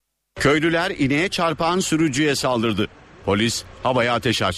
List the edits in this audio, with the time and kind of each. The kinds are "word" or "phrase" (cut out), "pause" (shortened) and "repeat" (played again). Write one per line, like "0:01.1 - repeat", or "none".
none